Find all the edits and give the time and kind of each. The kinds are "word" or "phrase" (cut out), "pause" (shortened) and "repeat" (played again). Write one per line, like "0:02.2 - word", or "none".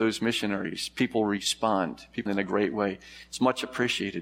0:02.3 - word